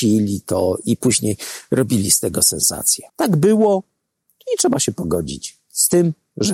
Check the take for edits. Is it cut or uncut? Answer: cut